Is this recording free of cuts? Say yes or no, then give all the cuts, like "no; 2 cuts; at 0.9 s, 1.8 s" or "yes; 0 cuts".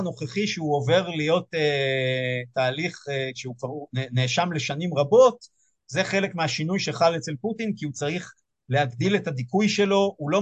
yes; 0 cuts